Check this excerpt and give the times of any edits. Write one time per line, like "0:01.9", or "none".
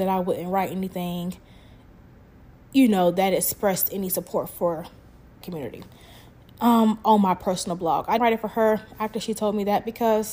0:05.4
0:08.2